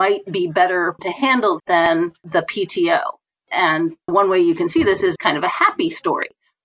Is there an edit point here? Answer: yes; 4 cuts; at 1.0 s, 1.6 s, 4.1 s, 5.2 s

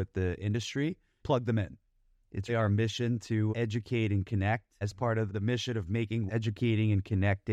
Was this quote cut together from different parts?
yes; 6 cuts; at 1.2 s, 2.5 s, 3.5 s, 4.8 s, 5.3 s, 6.3 s

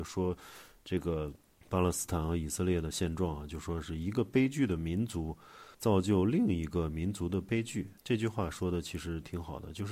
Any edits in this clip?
yes; 3 cuts; at 1.5 s, 5.7 s, 8.0 s

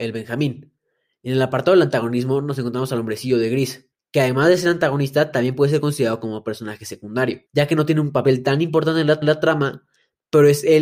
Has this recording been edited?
yes; 3 cuts; at 3.9 s, 7.5 s, 9.2 s

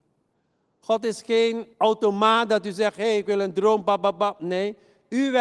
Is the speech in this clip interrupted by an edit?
yes; 1 cut; at 1.7 s

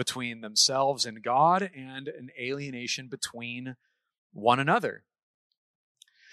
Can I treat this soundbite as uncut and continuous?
yes; 0 cuts

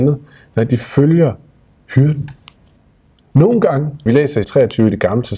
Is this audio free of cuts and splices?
no; 2 cuts; at 4.1 s, 4.4 s

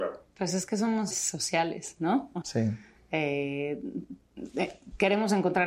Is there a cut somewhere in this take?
yes; 2 cuts; at 1.1 s, 2.4 s

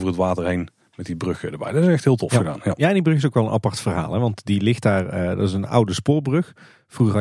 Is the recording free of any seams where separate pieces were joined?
yes; 0 cuts

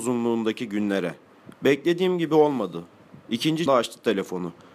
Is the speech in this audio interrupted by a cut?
yes; 1 cut; at 3.7 s

